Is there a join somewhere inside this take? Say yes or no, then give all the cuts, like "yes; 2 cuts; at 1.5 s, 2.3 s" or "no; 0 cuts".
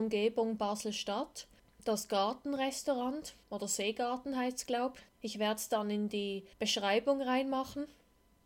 yes; 4 cuts; at 1.6 s, 3.4 s, 5.1 s, 6.5 s